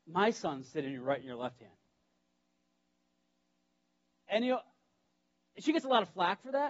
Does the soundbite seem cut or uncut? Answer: uncut